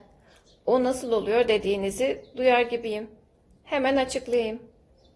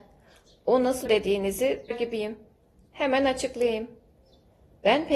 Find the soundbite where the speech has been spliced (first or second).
second